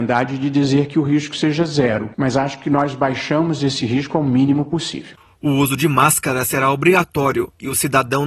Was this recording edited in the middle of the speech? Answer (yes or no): no